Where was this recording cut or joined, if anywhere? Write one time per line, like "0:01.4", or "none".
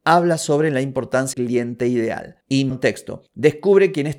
0:01.3
0:02.7